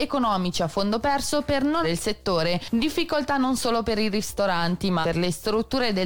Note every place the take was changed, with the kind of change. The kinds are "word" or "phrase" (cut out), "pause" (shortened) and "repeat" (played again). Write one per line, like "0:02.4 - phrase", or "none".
0:01.8 - word
0:05.0 - word